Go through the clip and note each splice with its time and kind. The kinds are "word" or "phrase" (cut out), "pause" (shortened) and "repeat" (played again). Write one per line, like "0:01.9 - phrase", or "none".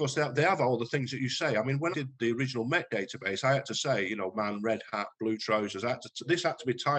0:01.9 - word
0:04.3 - word